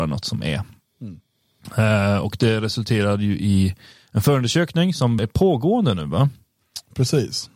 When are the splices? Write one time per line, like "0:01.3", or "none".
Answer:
0:05.2